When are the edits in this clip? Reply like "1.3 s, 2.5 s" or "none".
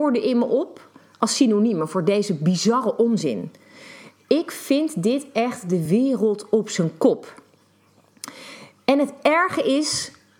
none